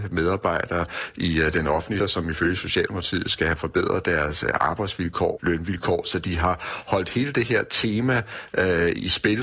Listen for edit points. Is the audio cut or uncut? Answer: cut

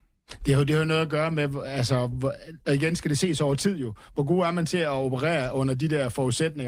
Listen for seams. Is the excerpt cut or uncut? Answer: uncut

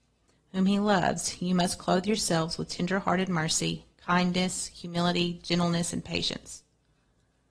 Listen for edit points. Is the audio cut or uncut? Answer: uncut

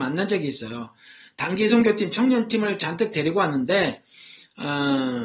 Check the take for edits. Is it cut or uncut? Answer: uncut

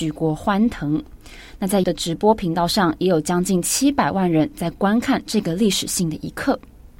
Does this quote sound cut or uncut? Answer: cut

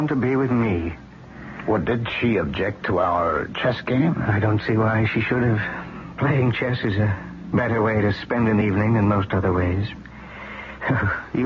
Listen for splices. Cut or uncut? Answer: uncut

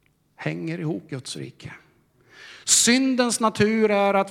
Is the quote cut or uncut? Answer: cut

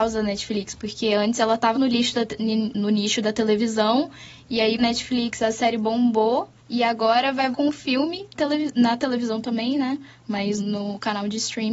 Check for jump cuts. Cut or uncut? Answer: cut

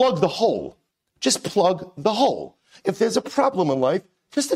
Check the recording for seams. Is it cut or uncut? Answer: uncut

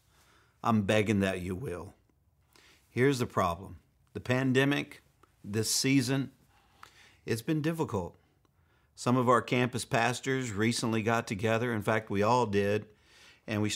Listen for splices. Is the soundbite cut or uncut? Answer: uncut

